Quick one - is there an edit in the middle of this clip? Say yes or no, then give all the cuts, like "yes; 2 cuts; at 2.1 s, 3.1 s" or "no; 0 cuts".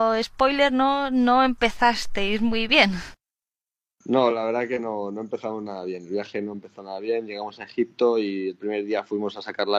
no; 0 cuts